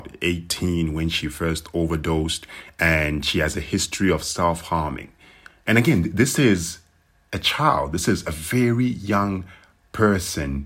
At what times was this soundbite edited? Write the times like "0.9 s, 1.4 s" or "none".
none